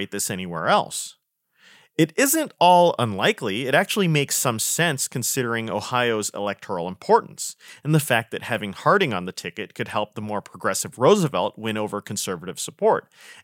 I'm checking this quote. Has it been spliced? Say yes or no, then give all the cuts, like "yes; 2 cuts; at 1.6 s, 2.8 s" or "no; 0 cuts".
no; 0 cuts